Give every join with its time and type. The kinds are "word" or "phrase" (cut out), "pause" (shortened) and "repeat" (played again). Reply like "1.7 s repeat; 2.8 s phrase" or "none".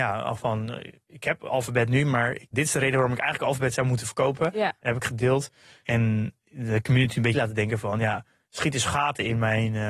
2.5 s word; 7.3 s word